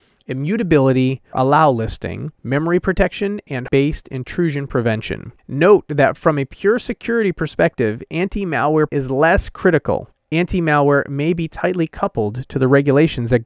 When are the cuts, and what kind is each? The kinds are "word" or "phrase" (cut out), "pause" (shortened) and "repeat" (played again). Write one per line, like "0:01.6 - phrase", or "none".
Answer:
0:01.3 - word
0:02.4 - pause
0:03.7 - word
0:05.4 - pause
0:08.9 - word
0:10.1 - pause